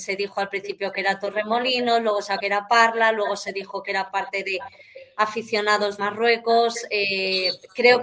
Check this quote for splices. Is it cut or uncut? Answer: cut